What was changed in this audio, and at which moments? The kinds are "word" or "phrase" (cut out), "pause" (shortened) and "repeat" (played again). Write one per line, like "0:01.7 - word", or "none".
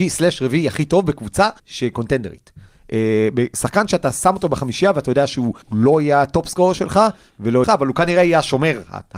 0:01.6 - pause
0:05.6 - pause
0:07.6 - phrase